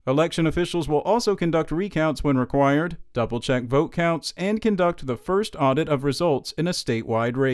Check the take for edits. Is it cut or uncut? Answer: uncut